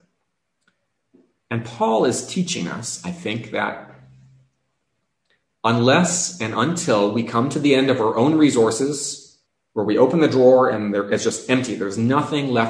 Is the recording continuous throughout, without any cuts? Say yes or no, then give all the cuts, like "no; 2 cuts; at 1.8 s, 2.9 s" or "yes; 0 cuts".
no; 1 cut; at 9.5 s